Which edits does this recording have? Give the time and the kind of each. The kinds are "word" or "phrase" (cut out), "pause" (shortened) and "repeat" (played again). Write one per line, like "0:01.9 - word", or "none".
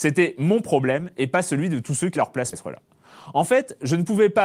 0:02.2 - phrase
0:02.5 - word